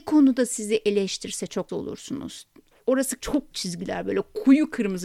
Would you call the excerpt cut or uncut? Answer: cut